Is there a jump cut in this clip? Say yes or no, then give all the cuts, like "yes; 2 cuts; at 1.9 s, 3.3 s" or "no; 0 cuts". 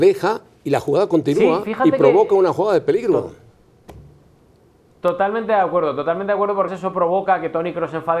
yes; 2 cuts; at 4.4 s, 6.7 s